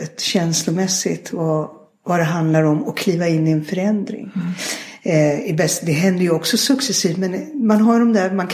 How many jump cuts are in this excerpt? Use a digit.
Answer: 0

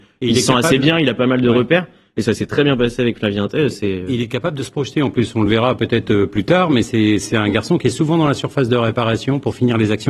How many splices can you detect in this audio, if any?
0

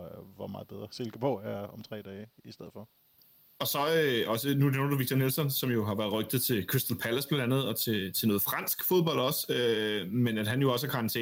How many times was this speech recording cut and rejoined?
0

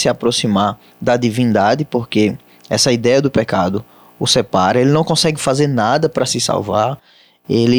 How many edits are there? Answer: 0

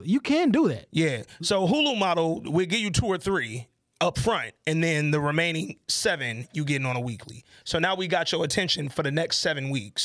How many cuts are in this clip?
0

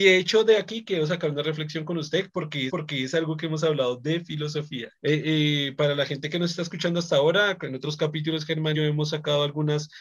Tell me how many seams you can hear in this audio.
3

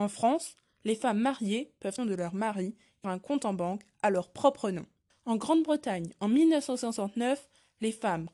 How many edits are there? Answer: 3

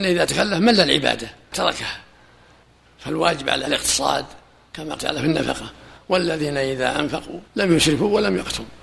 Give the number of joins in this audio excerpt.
4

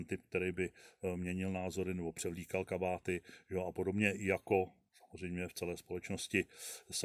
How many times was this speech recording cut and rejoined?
0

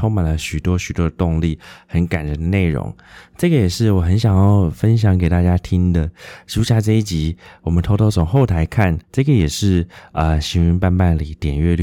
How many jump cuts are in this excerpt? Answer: 1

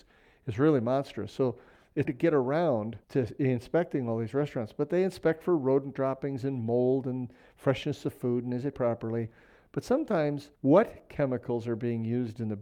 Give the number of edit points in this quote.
4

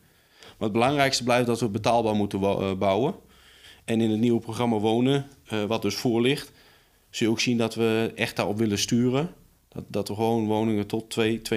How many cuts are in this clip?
0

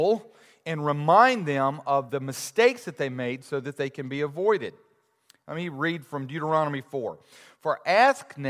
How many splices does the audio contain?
1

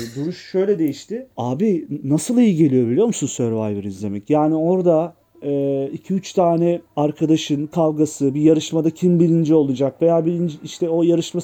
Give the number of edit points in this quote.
3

